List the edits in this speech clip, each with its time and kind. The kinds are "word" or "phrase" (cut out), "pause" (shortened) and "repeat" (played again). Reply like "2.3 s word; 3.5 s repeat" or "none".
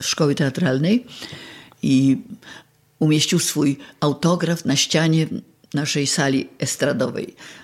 none

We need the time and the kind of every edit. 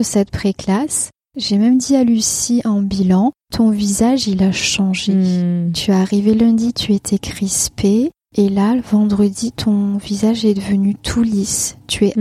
3.4 s pause

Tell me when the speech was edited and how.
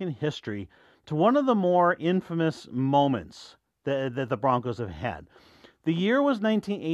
none

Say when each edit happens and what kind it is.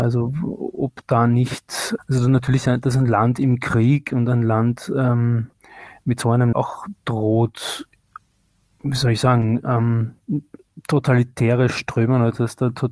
2.0 s word; 6.5 s phrase

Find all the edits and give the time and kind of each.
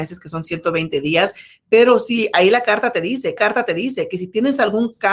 3.4 s repeat

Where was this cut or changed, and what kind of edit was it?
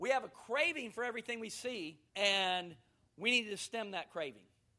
2.1 s pause

